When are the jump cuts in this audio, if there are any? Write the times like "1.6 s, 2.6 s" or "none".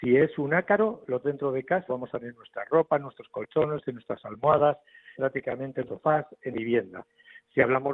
1.2 s, 1.9 s, 2.2 s, 5.1 s, 5.9 s, 6.5 s